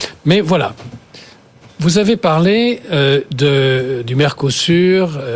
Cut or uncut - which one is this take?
uncut